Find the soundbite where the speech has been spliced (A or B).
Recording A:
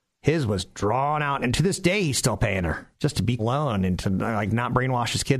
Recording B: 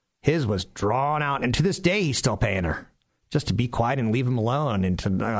A